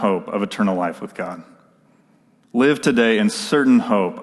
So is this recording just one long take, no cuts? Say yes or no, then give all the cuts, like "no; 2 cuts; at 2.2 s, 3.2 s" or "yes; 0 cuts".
yes; 0 cuts